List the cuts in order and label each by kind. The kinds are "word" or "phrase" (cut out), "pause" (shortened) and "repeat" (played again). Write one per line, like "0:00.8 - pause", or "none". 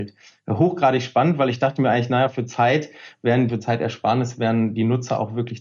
0:03.5 - phrase